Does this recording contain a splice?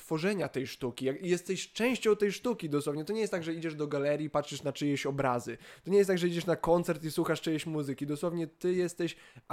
no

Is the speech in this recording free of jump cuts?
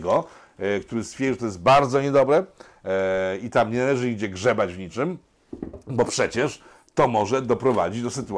yes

